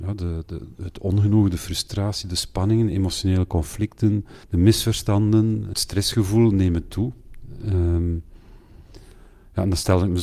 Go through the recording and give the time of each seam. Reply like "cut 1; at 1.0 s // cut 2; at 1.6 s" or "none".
cut 1; at 4.4 s // cut 2; at 5.7 s